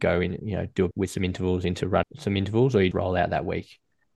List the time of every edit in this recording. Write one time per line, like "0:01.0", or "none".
0:00.9
0:02.0
0:02.9